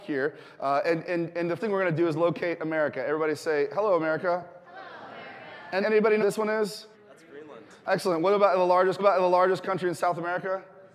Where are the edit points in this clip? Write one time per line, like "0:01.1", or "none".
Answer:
0:01.0
0:01.6
0:05.8
0:06.2
0:06.9
0:09.0